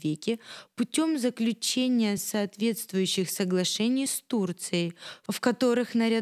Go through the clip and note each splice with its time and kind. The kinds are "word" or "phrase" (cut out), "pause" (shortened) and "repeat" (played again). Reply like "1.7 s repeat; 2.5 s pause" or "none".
none

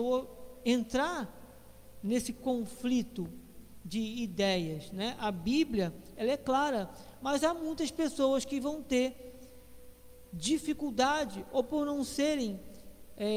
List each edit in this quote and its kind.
none

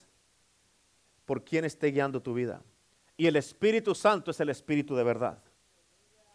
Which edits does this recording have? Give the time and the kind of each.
none

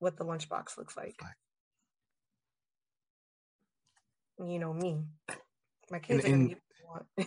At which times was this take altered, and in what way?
none

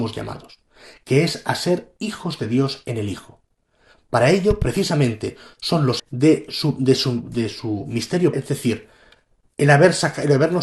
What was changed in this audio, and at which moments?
6.0 s word; 8.3 s word

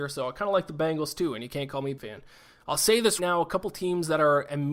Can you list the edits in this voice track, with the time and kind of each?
2.0 s word; 3.2 s word

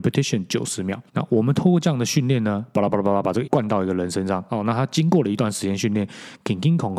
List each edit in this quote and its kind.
1.1 s pause; 3.5 s word

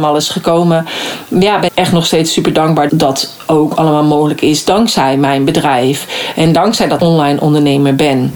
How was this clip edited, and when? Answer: 1.7 s word; 2.9 s word; 7.0 s word

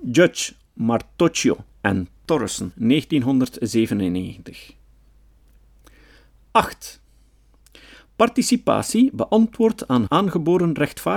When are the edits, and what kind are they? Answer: 10.1 s word

